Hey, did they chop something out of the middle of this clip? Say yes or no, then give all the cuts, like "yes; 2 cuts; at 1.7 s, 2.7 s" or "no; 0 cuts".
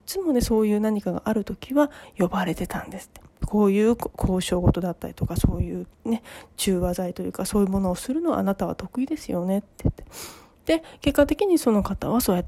yes; 1 cut; at 5.9 s